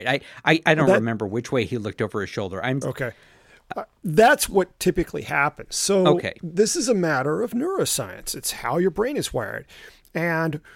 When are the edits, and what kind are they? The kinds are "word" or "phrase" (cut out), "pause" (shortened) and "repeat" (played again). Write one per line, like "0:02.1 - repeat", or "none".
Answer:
0:02.8 - word